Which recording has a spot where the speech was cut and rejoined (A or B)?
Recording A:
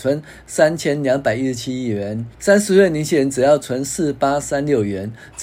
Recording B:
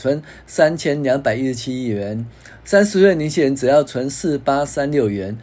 A